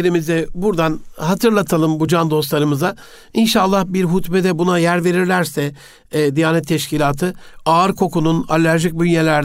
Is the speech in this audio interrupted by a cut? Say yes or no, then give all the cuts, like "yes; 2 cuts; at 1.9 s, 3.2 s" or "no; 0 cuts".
no; 0 cuts